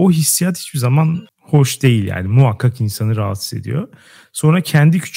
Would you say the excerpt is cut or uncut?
uncut